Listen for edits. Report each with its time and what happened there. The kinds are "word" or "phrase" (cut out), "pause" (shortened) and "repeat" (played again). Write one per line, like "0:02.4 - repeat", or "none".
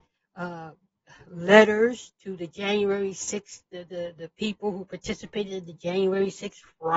0:03.7 - pause